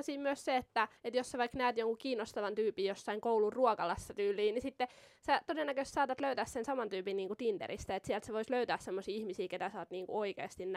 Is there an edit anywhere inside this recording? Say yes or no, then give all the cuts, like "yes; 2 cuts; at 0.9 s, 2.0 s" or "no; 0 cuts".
yes; 2 cuts; at 1.0 s, 8.5 s